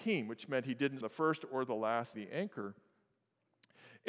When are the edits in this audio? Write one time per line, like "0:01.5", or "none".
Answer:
0:01.0
0:02.1